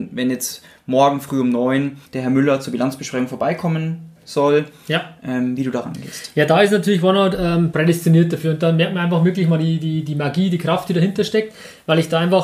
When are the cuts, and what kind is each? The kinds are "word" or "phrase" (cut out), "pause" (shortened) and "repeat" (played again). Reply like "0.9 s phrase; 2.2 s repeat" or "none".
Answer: 2.1 s pause